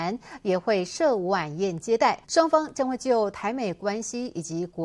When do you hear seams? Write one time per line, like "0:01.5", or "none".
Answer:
0:02.2

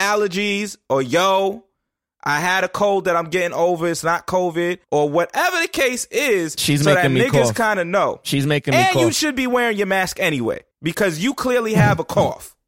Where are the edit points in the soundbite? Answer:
0:04.8
0:10.7

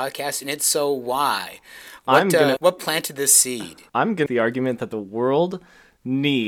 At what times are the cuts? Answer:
0:02.6
0:03.9
0:04.3

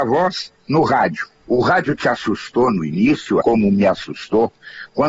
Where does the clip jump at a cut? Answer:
0:01.4
0:03.4

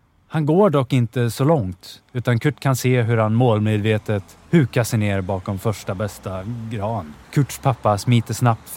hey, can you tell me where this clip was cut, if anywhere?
0:02.1
0:04.4
0:07.2

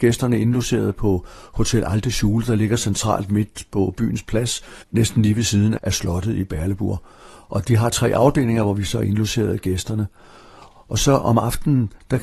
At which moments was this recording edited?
0:04.8
0:05.8

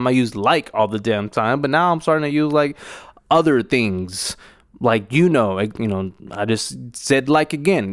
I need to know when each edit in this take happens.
0:06.2

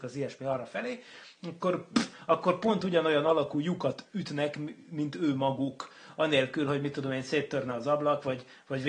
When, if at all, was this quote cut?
none

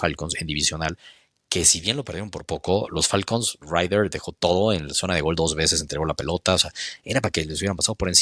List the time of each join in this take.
0:03.6

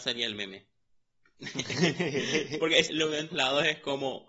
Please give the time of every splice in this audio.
0:02.9
0:03.3

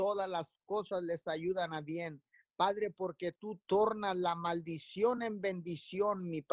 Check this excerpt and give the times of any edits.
none

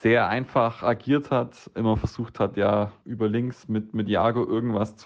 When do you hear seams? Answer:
0:03.0

